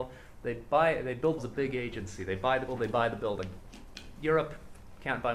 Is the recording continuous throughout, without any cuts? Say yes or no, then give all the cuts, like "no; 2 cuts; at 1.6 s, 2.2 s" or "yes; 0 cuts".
no; 2 cuts; at 1.4 s, 2.7 s